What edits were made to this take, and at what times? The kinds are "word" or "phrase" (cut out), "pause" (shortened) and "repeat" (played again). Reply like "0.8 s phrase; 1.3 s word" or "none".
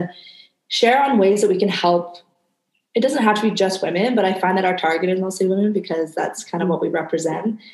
none